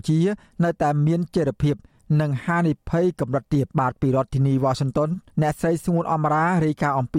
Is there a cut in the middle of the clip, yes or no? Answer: yes